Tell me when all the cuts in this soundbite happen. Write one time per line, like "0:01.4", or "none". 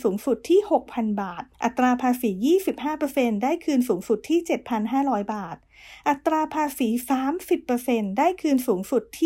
0:01.5